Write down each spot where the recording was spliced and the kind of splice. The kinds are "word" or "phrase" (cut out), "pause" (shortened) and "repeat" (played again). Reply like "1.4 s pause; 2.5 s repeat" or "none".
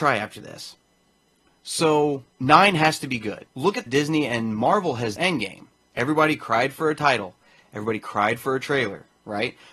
2.3 s pause; 3.5 s pause; 3.9 s phrase; 5.2 s phrase